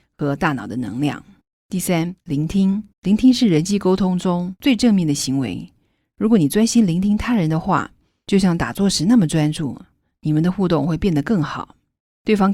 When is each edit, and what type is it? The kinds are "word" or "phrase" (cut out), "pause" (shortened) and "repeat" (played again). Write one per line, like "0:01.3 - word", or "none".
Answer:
0:01.4 - pause
0:02.9 - pause